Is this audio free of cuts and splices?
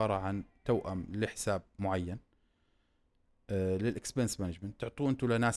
yes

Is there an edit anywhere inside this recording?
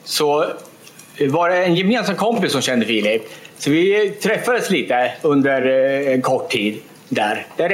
no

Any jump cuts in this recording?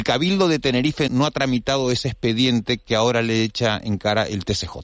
yes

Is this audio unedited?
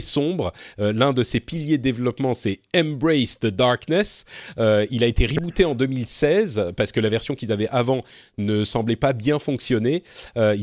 yes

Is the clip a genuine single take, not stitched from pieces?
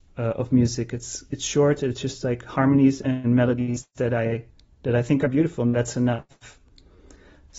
yes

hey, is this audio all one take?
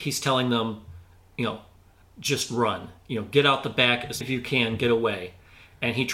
no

